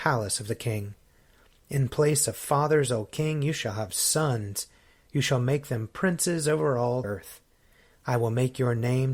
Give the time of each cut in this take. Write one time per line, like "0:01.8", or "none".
0:07.0